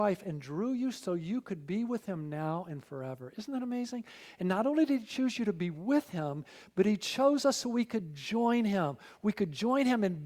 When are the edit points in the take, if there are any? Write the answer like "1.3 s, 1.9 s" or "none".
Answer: none